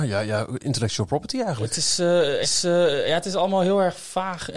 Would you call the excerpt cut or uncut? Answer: cut